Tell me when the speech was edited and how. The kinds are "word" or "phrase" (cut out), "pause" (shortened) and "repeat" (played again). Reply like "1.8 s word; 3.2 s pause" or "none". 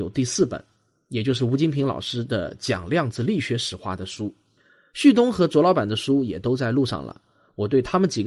none